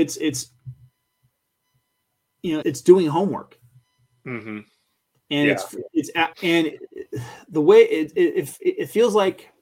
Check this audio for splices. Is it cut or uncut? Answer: cut